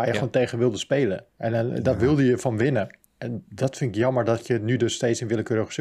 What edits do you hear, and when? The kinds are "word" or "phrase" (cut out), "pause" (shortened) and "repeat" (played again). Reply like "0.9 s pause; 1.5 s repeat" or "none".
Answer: 1.3 s pause; 3.0 s pause